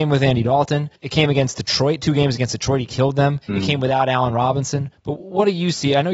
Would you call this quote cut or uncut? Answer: cut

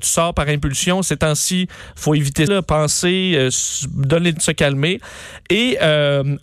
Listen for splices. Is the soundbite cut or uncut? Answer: cut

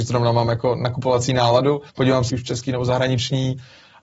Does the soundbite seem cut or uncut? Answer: cut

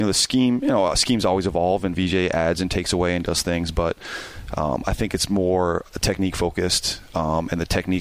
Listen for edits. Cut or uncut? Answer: uncut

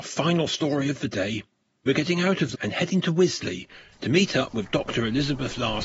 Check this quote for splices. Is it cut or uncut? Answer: cut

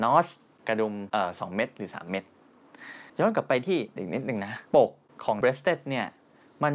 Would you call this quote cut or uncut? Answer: cut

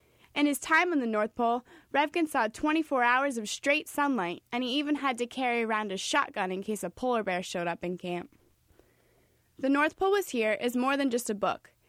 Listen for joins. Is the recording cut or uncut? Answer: uncut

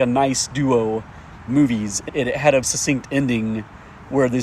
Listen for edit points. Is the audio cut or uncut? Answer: cut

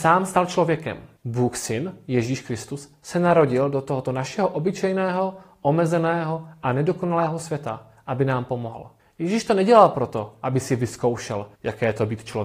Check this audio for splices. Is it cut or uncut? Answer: cut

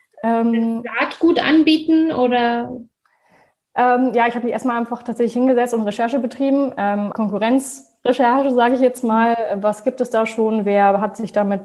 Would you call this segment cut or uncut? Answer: cut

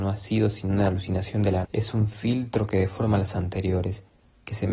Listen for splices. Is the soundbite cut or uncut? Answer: cut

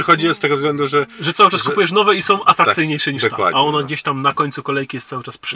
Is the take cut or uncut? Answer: uncut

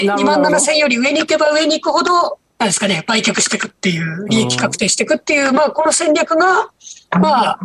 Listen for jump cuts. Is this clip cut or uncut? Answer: cut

